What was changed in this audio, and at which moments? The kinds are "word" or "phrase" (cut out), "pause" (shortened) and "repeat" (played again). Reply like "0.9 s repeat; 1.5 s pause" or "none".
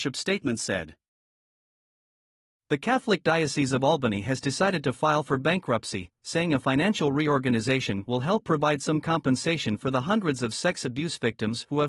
none